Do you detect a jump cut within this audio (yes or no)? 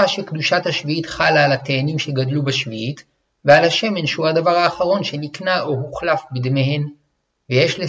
no